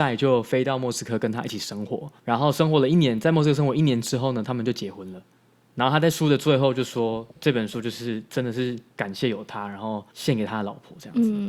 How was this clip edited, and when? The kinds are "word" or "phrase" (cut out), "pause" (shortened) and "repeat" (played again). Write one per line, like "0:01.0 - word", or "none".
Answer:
0:02.2 - pause
0:07.3 - pause
0:08.9 - pause
0:10.1 - pause